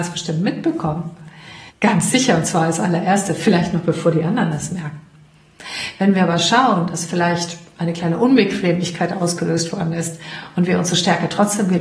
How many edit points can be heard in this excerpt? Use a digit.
1